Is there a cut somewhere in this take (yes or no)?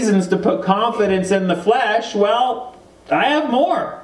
no